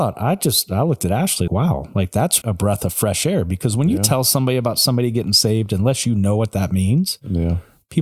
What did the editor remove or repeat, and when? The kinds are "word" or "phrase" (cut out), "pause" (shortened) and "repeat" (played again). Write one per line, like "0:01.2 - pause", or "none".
0:01.5 - word
0:02.4 - word